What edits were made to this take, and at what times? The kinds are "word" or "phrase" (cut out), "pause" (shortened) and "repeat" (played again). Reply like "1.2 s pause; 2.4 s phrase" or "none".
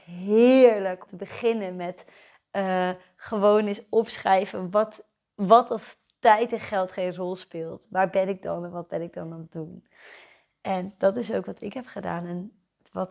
1.1 s word